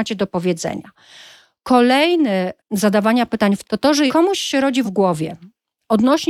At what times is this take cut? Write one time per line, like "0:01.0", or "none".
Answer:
0:02.6
0:03.6
0:04.1
0:04.8